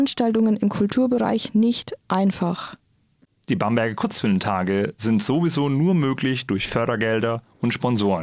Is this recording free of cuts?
yes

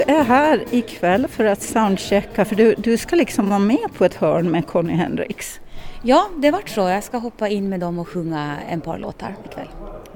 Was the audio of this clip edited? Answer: no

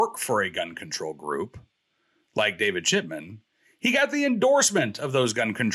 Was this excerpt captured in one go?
yes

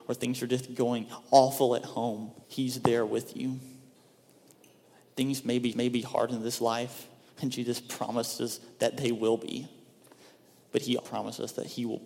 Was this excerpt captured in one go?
no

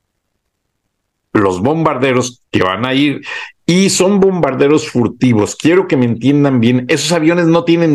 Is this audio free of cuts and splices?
no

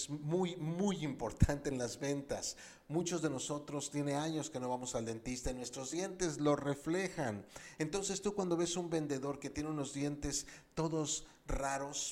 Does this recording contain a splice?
no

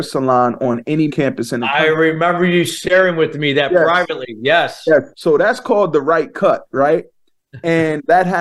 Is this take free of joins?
no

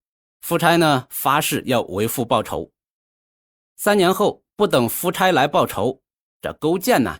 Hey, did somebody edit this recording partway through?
no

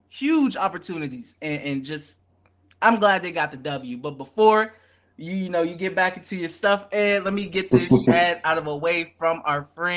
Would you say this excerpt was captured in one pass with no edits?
yes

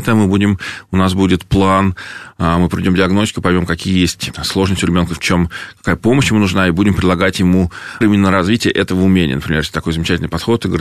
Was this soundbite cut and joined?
yes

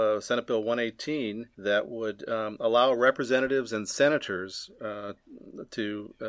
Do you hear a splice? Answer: yes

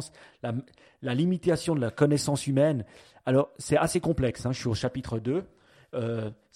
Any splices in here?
no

